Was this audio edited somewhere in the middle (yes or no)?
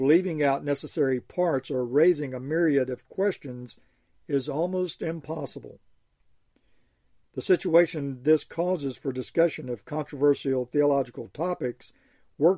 no